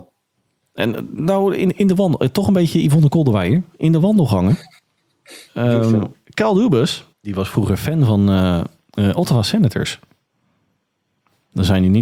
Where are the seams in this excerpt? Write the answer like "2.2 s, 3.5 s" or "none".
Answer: 7.1 s